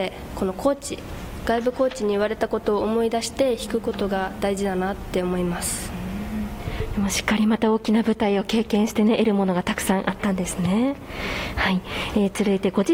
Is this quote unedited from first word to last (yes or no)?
yes